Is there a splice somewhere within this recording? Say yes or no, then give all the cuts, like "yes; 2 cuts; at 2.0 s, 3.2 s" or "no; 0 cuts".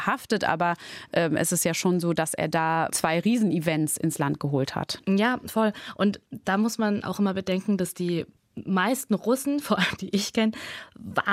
yes; 3 cuts; at 2.9 s, 7.0 s, 10.0 s